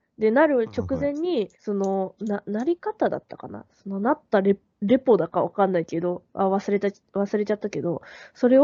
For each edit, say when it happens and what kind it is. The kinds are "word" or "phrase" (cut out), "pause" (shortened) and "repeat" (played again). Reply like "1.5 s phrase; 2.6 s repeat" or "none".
1.5 s pause